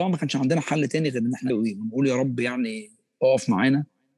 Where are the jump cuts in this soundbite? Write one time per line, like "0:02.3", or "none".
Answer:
0:01.5